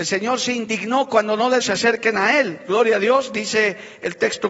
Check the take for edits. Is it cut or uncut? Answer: cut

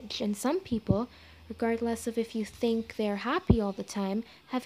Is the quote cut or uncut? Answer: uncut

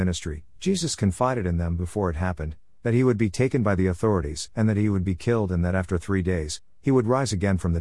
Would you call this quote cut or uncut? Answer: uncut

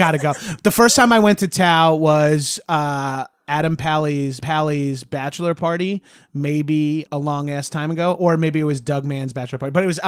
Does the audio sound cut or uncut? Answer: cut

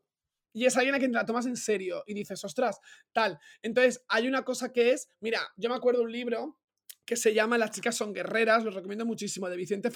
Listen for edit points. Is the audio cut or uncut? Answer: uncut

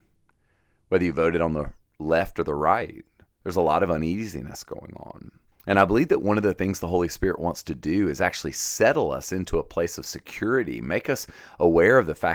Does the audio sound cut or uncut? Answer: cut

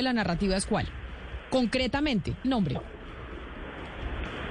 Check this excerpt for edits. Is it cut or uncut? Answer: cut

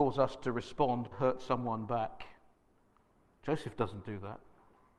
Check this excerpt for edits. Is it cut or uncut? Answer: cut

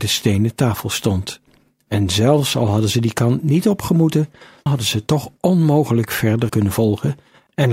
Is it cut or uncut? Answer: cut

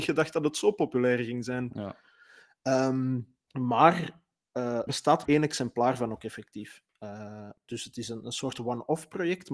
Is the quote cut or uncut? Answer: cut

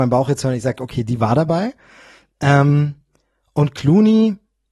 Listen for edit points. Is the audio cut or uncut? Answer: uncut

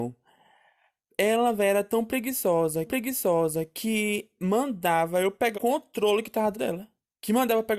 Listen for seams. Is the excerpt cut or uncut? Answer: cut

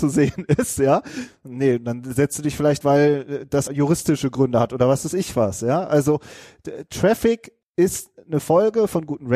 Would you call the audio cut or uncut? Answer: cut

